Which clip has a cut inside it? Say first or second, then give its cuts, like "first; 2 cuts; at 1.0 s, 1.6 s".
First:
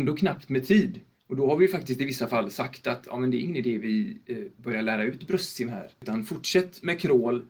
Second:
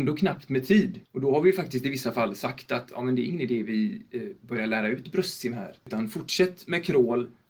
second; 1 cut; at 1.0 s